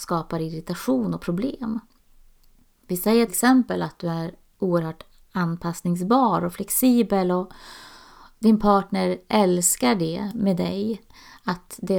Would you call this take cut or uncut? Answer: cut